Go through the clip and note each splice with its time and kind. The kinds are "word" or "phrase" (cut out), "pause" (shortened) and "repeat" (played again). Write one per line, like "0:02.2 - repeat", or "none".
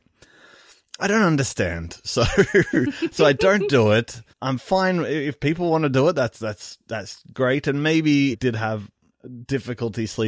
0:04.3 - pause
0:07.3 - word
0:08.3 - phrase